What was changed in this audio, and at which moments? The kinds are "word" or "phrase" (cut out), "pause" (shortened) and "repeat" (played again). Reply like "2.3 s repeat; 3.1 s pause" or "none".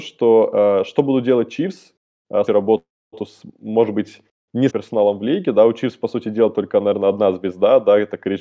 2.5 s phrase; 4.7 s phrase